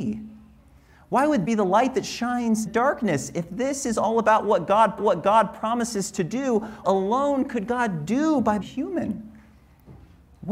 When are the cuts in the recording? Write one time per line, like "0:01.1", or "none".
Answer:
0:01.5
0:02.7
0:05.0
0:06.8
0:08.6